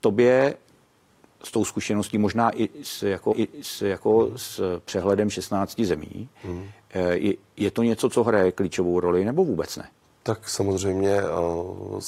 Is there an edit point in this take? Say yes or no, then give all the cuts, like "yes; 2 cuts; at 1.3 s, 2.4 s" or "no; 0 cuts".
yes; 2 cuts; at 3.3 s, 10.0 s